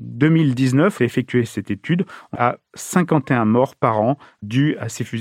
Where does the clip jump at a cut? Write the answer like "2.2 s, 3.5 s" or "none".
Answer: 1.0 s, 2.3 s